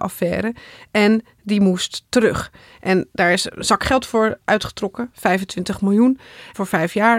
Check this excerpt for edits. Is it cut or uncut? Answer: uncut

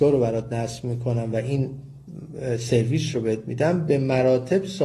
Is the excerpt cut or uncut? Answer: uncut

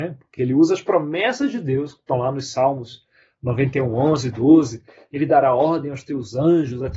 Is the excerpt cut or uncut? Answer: uncut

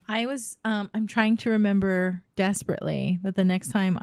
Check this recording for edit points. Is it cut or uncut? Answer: uncut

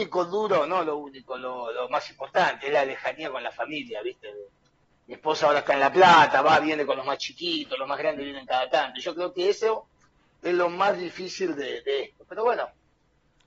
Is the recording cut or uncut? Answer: uncut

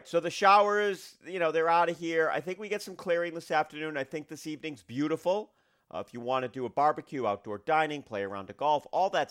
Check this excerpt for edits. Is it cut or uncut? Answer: uncut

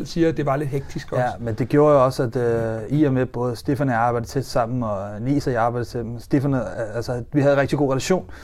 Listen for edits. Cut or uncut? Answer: uncut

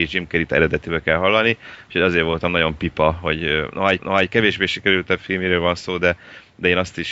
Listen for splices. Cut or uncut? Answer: cut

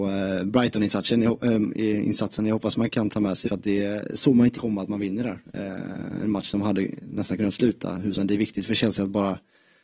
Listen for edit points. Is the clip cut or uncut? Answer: cut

